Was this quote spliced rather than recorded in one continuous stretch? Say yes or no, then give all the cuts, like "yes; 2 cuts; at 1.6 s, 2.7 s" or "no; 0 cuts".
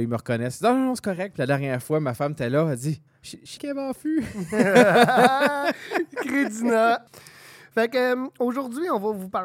yes; 2 cuts; at 3.1 s, 3.6 s